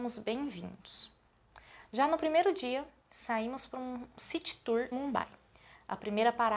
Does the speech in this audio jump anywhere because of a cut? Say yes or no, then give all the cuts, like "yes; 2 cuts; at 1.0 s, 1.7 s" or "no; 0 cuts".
yes; 1 cut; at 4.9 s